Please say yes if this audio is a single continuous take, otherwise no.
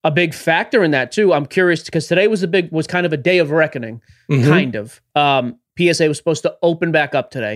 yes